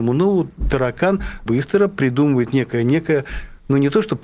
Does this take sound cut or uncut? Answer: cut